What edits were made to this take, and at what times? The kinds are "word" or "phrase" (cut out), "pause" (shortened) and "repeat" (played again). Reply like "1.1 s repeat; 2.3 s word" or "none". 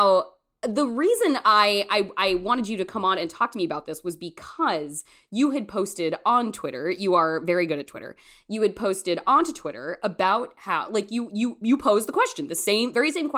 none